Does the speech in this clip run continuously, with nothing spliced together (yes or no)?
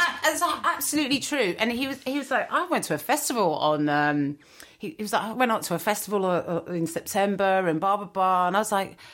yes